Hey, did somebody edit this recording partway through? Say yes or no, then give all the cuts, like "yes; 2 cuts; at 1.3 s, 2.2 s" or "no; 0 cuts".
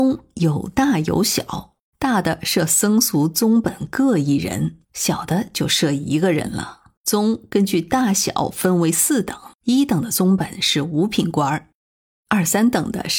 yes; 4 cuts; at 1.9 s, 4.8 s, 7.0 s, 9.5 s